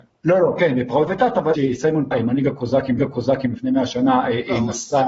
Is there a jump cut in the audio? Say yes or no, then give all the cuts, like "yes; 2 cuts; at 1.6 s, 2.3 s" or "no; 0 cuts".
yes; 4 cuts; at 1.1 s, 1.5 s, 2.1 s, 3.0 s